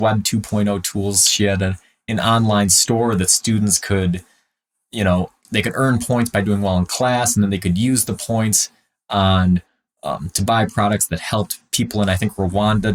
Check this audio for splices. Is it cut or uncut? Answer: uncut